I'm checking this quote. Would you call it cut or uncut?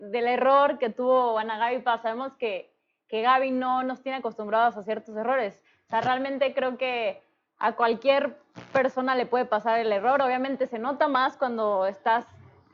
uncut